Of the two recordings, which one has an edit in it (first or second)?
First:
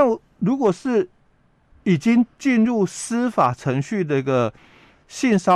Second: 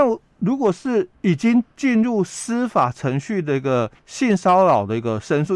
second